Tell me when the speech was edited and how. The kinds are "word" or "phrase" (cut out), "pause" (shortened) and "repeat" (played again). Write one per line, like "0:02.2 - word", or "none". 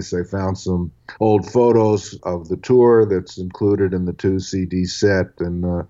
0:01.2 - pause